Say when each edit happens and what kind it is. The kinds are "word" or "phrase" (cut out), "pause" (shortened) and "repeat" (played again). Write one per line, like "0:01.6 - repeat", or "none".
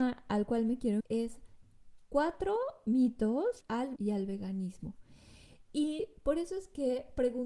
0:01.0 - word
0:03.6 - word
0:04.0 - word